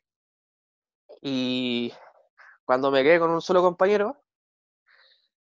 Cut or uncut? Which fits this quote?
uncut